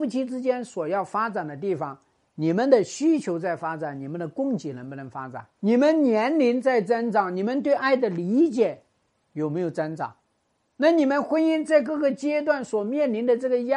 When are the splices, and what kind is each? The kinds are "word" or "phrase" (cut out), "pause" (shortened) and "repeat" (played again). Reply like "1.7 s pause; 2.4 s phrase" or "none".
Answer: 5.6 s pause

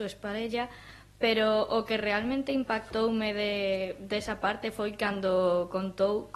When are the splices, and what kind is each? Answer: none

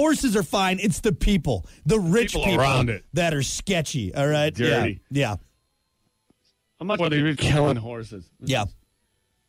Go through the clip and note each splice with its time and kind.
7.0 s word; 7.3 s word

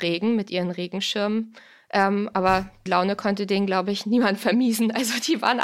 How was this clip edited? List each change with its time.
2.9 s word

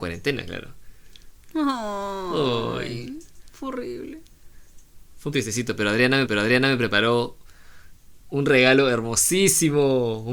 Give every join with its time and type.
5.3 s word; 6.3 s repeat

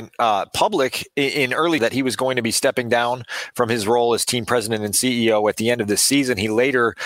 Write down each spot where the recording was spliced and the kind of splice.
1.8 s word

